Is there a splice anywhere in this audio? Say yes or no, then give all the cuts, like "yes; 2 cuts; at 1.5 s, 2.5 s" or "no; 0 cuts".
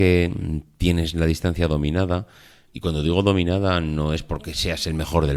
no; 0 cuts